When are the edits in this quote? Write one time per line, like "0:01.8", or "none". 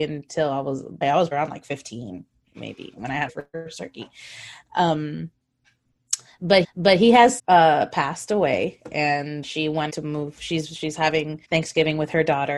0:01.0
0:01.3
0:03.3
0:06.6
0:07.4
0:09.4
0:09.9
0:11.4